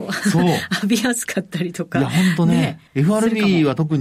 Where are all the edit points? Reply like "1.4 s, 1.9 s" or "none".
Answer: 2.9 s